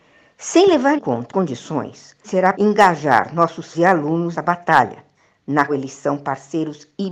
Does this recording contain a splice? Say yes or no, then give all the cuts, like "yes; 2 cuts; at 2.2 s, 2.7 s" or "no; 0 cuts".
yes; 7 cuts; at 1.0 s, 1.3 s, 2.2 s, 2.5 s, 3.7 s, 4.3 s, 5.7 s